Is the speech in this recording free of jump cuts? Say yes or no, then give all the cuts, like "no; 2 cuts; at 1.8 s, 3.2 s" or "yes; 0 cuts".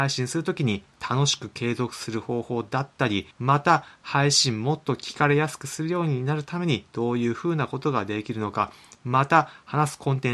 no; 1 cut; at 3.3 s